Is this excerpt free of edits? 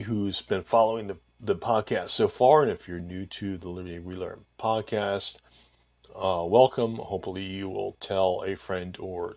yes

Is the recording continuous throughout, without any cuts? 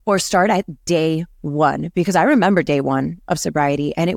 yes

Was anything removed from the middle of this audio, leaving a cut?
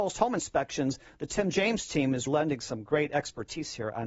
yes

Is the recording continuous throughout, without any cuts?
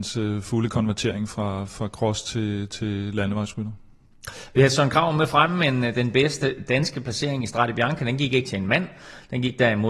yes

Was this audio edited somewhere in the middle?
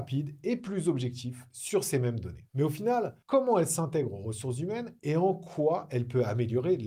yes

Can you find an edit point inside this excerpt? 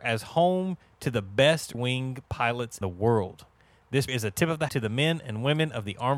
yes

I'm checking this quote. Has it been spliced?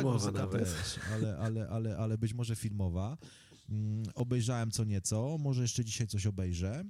no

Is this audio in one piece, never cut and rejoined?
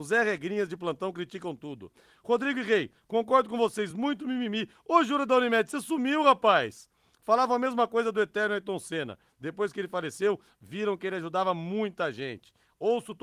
yes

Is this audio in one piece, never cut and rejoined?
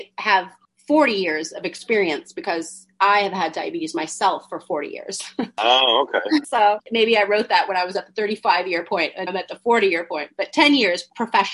no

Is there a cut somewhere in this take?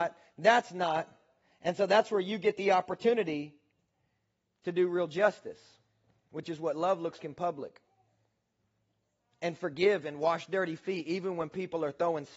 yes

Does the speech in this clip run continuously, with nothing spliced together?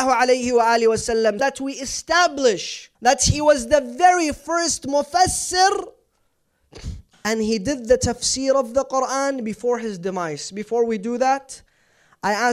no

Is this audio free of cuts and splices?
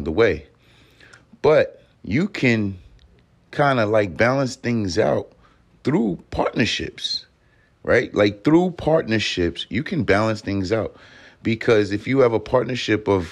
no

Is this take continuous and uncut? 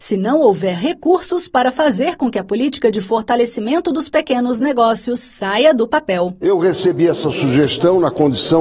yes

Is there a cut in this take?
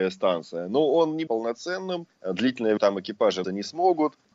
yes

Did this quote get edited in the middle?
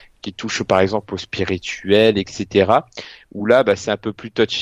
no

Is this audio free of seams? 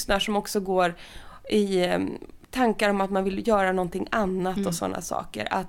yes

